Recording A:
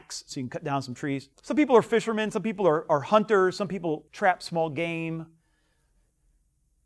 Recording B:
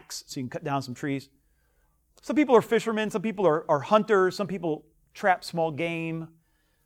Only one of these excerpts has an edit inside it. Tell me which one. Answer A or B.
A